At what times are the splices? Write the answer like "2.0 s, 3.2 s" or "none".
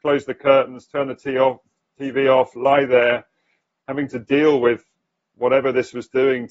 none